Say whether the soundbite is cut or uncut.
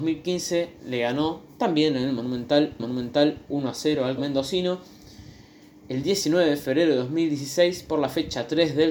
cut